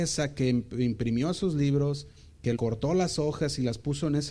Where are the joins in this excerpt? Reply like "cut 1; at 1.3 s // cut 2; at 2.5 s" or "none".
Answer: cut 1; at 2.6 s